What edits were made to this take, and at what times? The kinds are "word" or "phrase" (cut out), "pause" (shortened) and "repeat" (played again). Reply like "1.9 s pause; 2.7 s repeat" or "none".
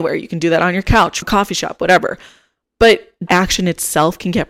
1.2 s word; 3.3 s word